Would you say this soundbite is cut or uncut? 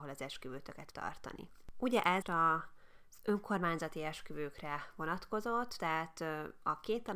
cut